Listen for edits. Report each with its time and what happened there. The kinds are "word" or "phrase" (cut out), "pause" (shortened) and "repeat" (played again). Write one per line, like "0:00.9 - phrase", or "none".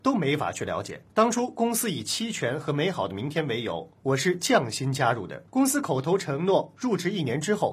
0:01.1 - pause
0:05.5 - pause